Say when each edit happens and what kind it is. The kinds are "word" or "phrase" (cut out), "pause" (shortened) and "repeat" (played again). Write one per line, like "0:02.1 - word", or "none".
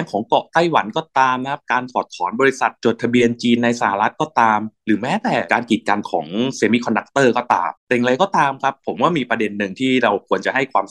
0:07.8 - pause